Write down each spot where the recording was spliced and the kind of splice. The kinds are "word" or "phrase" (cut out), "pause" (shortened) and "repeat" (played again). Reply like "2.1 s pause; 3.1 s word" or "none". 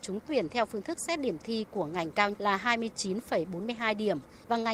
2.3 s word